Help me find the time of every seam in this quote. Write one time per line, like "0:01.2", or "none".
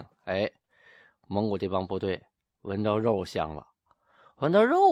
none